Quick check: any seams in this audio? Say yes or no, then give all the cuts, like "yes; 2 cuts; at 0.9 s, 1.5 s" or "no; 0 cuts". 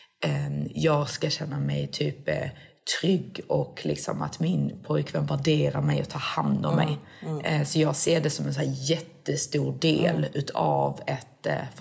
no; 0 cuts